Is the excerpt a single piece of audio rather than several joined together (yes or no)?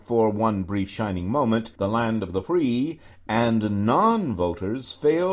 yes